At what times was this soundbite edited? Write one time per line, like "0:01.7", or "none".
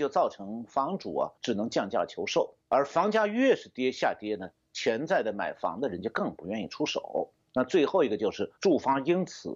0:01.4
0:02.6
0:08.6